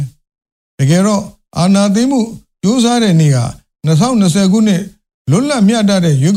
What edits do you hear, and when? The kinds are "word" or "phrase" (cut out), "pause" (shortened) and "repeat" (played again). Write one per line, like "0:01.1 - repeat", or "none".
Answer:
none